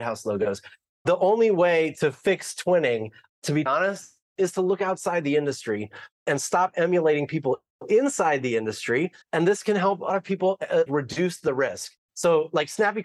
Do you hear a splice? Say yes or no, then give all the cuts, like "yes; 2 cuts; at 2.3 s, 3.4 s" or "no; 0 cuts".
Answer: yes; 4 cuts; at 3.7 s, 9.2 s, 10.1 s, 10.9 s